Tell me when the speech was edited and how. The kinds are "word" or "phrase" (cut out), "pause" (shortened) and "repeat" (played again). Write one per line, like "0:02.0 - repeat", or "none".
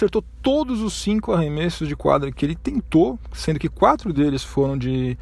none

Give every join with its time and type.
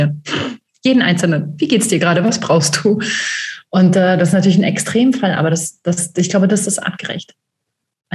none

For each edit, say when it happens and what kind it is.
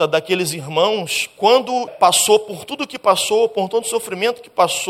0:01.9 - phrase

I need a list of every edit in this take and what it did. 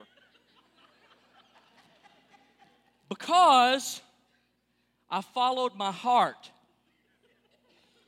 none

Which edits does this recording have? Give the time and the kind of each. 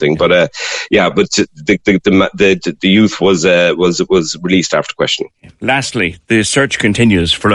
none

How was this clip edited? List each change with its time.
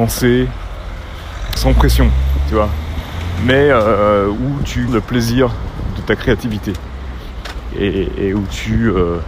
0:01.6 - phrase
0:04.4 - word
0:04.9 - word

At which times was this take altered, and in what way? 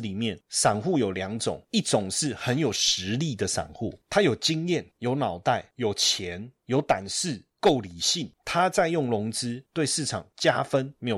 none

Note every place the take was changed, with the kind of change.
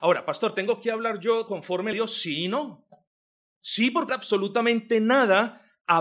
0:01.5 - word
0:01.9 - phrase
0:03.2 - pause
0:04.1 - phrase

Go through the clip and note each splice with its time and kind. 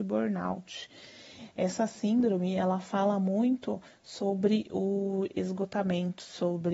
none

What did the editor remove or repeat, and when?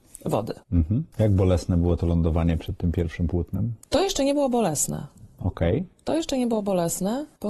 0:05.9 - pause

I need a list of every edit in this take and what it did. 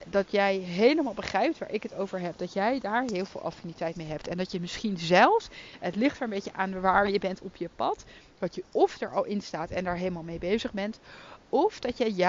none

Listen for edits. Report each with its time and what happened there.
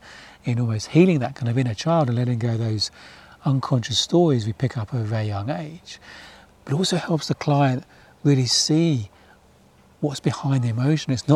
none

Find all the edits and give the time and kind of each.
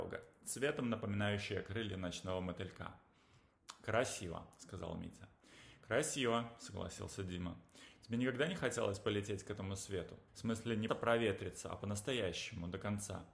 0:10.3 - pause
0:10.9 - word

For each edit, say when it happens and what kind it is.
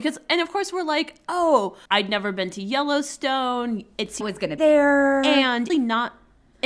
0:01.9 - pause
0:04.2 - word
0:04.6 - word
0:05.7 - phrase

